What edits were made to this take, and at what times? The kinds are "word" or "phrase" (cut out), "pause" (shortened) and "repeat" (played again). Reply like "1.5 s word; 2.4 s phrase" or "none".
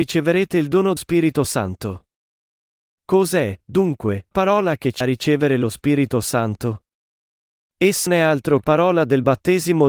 1.0 s word; 4.3 s word; 5.0 s word; 8.1 s word; 8.6 s word